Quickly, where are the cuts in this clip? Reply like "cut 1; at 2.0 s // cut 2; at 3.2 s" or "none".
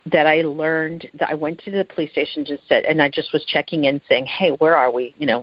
none